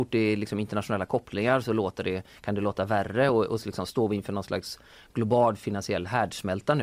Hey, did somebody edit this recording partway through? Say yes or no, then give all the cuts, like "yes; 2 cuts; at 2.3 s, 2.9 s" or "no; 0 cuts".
no; 0 cuts